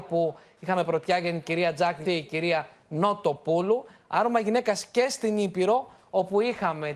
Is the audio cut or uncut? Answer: cut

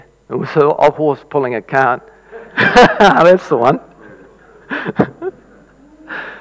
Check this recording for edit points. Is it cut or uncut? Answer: cut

